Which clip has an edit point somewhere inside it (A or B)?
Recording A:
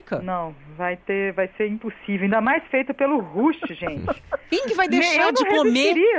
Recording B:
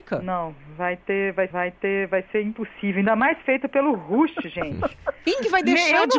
B